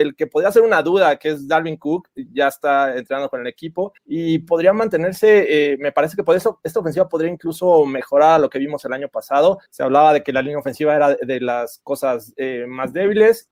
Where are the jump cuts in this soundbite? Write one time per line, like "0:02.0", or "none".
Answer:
0:04.0
0:09.7